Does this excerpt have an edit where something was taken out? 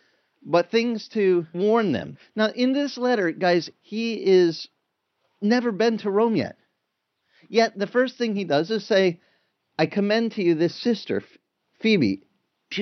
no; 0 cuts

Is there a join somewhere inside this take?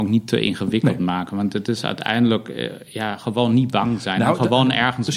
no; 0 cuts

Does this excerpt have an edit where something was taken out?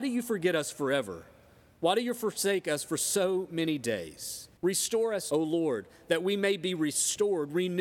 yes; 2 cuts; at 4.6 s, 5.3 s

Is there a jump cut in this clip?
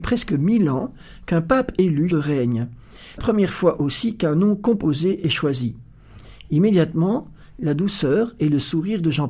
yes; 2 cuts; at 2.1 s, 3.2 s

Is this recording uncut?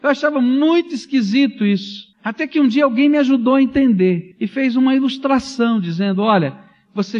no; 2 cuts; at 2.1 s, 4.3 s

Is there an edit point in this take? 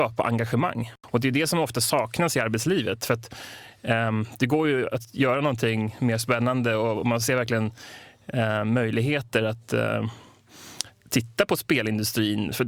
no; 0 cuts

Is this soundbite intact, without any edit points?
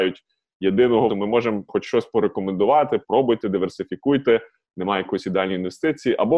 no; 2 cuts; at 1.1 s, 1.7 s

